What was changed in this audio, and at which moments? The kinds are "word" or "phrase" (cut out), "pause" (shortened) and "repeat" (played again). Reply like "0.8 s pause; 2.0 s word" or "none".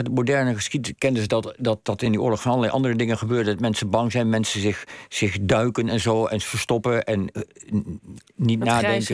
none